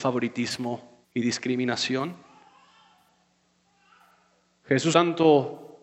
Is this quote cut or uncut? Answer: cut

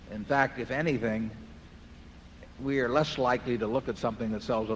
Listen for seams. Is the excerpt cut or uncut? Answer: uncut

